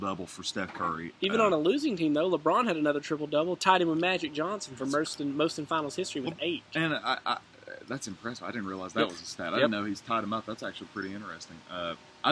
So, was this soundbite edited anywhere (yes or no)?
no